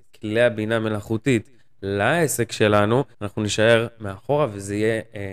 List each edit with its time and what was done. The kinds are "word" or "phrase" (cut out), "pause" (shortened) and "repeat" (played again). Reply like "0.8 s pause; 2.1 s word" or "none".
3.1 s pause